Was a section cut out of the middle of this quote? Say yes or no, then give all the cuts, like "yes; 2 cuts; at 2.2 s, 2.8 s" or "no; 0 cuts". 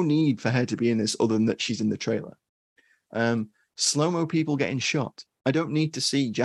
no; 0 cuts